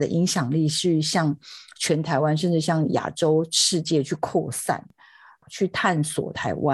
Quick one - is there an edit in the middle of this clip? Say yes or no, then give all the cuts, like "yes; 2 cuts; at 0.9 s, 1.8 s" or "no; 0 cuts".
no; 0 cuts